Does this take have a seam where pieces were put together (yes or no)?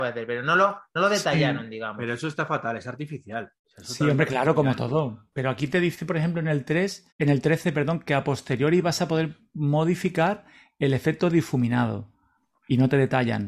yes